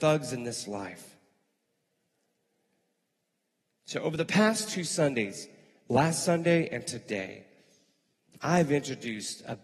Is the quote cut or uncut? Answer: uncut